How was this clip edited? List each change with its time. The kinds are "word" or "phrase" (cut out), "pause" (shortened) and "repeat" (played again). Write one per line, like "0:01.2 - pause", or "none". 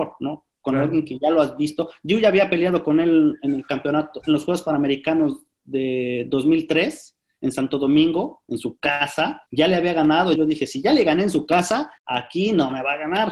0:09.5 - pause
0:10.4 - word
0:12.0 - pause